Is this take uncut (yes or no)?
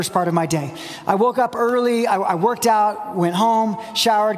yes